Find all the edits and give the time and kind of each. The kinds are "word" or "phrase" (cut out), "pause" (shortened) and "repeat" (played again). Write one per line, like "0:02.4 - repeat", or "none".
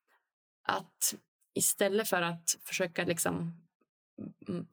none